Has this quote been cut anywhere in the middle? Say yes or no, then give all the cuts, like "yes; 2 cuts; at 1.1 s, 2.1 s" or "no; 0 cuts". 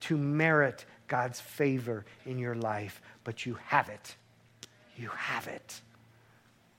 no; 0 cuts